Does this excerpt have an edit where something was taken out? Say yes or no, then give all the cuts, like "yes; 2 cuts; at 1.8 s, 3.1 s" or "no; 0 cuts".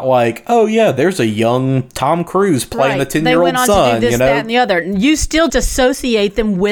yes; 1 cut; at 5.5 s